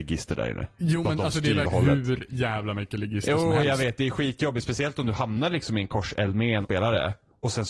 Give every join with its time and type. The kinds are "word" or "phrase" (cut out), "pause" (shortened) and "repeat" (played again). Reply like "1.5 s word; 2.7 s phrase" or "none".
1.6 s phrase; 6.6 s word